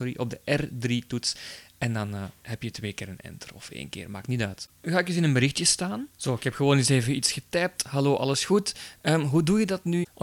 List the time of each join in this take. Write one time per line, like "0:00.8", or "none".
0:06.1